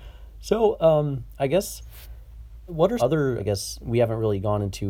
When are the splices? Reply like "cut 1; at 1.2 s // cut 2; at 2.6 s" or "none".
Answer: cut 1; at 2.7 s // cut 2; at 3.0 s // cut 3; at 3.4 s